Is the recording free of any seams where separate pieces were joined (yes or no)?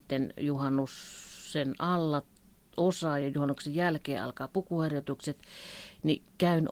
yes